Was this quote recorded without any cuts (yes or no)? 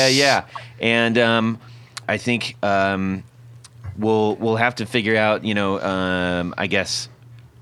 no